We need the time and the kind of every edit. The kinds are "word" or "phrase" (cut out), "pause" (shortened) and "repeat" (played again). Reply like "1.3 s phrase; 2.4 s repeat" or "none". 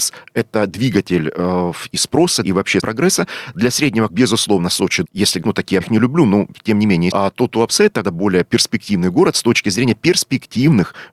2.4 s word; 2.8 s word; 4.1 s word; 5.0 s word; 5.4 s word; 5.8 s word; 7.1 s word; 8.0 s word